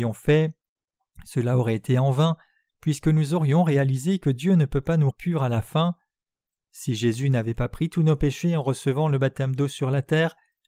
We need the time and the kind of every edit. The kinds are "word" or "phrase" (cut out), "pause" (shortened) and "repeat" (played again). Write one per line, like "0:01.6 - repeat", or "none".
0:05.1 - word